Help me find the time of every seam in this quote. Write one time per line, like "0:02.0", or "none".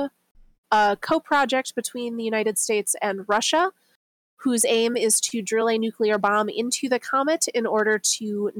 none